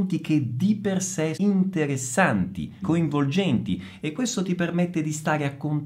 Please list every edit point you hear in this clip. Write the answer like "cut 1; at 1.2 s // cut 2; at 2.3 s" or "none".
cut 1; at 1.4 s // cut 2; at 2.8 s